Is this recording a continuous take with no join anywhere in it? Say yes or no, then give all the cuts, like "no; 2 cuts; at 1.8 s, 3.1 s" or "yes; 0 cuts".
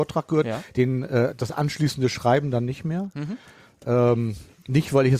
yes; 0 cuts